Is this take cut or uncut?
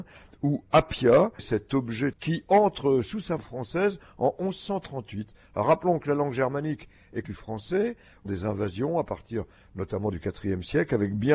cut